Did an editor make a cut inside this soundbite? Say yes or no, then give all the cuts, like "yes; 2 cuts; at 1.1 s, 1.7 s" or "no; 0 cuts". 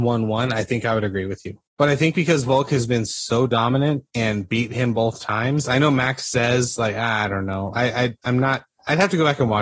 yes; 2 cuts; at 1.7 s, 4.1 s